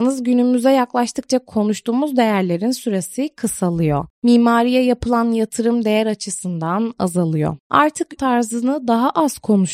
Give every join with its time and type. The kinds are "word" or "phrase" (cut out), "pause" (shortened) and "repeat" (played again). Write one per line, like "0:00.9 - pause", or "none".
0:08.2 - phrase